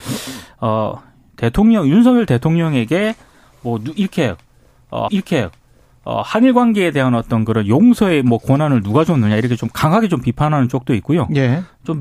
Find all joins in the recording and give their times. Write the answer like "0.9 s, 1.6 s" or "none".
5.1 s